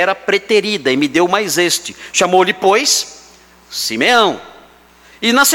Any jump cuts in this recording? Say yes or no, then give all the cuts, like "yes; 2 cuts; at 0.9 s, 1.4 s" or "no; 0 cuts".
no; 0 cuts